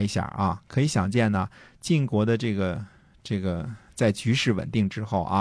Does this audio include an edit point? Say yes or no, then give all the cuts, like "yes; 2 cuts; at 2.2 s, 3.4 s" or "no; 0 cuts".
no; 0 cuts